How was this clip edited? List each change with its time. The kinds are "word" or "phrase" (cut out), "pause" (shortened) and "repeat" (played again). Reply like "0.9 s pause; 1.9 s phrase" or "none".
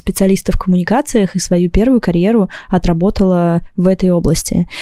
none